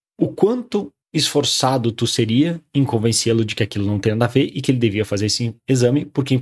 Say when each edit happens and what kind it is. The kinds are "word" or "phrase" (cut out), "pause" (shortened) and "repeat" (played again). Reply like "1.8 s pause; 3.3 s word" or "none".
1.0 s pause